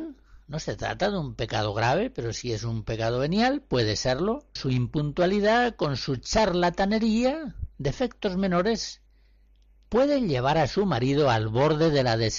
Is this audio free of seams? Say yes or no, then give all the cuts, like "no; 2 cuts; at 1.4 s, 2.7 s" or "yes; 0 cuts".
no; 1 cut; at 4.6 s